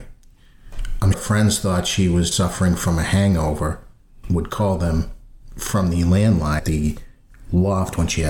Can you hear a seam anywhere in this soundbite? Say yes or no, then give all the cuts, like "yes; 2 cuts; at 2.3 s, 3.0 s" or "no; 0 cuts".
yes; 4 cuts; at 1.1 s, 2.3 s, 4.2 s, 6.6 s